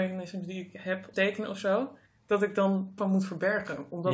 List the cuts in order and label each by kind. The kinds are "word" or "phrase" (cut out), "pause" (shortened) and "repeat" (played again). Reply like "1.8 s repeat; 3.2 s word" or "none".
1.1 s phrase; 2.1 s pause; 3.0 s phrase